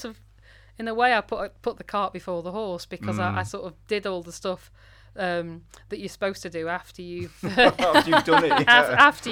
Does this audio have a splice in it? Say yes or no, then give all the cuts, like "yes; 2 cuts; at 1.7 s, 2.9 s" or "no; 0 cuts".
no; 0 cuts